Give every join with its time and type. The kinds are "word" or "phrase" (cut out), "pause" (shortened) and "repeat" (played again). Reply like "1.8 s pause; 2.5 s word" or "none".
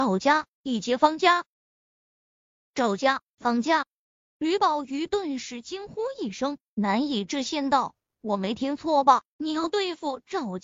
none